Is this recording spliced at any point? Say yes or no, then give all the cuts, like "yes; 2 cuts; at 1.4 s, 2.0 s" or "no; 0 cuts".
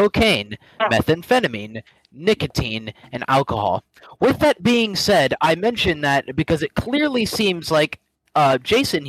no; 0 cuts